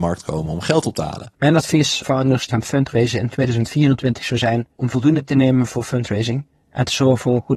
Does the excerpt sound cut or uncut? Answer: cut